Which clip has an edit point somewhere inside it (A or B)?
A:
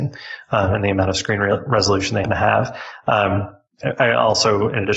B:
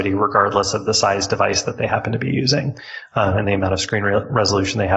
A